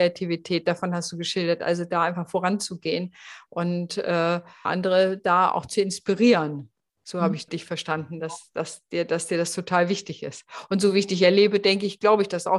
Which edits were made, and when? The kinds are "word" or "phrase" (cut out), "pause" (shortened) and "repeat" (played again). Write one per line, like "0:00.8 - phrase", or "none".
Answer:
0:04.6 - word
0:07.5 - word